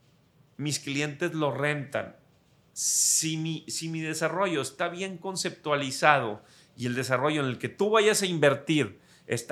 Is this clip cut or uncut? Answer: uncut